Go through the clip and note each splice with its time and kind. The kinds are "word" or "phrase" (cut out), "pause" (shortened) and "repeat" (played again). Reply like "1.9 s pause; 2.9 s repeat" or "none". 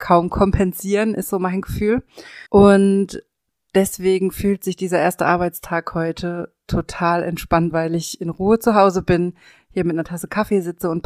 2.5 s pause; 7.7 s word

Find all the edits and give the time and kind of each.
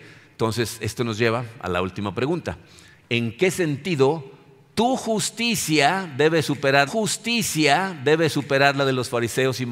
6.9 s repeat

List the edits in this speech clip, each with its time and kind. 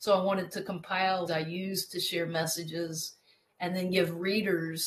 1.3 s word

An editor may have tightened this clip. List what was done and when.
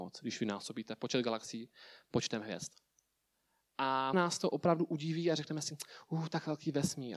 4.1 s word

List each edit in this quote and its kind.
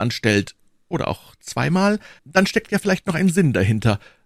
2.2 s pause

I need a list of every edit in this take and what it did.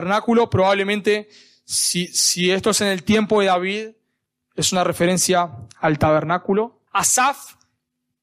6.9 s pause

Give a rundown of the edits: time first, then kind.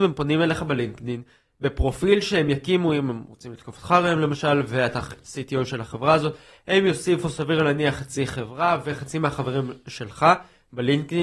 none

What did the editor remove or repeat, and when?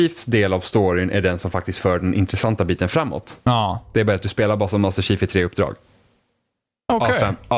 3.4 s pause

